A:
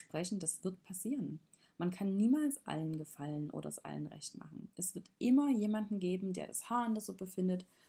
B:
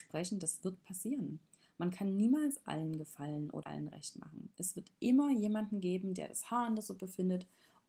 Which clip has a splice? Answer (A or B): B